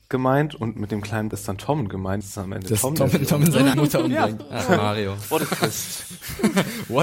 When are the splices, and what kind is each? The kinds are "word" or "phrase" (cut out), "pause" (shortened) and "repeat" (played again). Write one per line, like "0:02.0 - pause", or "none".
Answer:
0:01.3 - word
0:02.2 - word
0:03.7 - word